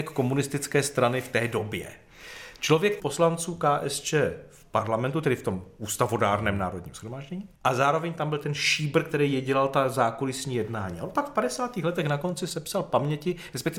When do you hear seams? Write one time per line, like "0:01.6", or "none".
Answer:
0:03.0
0:07.5